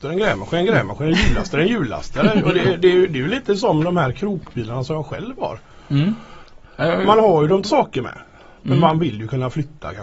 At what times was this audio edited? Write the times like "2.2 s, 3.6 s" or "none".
7.7 s